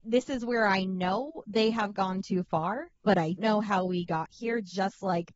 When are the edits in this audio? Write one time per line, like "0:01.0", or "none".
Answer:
0:02.9
0:03.4